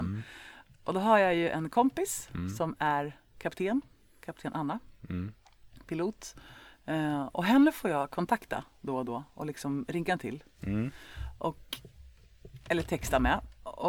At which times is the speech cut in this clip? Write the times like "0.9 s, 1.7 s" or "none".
none